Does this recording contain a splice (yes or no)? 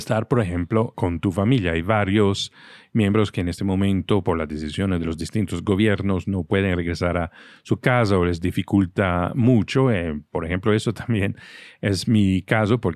yes